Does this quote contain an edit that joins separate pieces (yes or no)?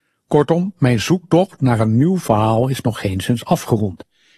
no